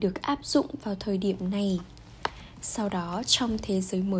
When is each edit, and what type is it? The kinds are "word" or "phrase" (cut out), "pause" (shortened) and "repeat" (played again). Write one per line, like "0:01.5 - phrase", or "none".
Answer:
none